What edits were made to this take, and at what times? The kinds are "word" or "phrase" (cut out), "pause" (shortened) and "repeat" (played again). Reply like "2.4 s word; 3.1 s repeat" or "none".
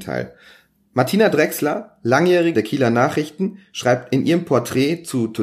2.5 s word